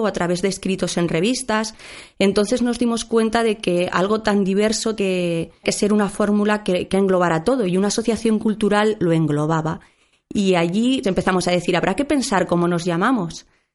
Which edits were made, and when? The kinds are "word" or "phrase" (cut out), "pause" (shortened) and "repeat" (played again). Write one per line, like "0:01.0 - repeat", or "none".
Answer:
0:05.0 - word
0:05.6 - word
0:06.9 - word
0:09.0 - word
0:11.0 - word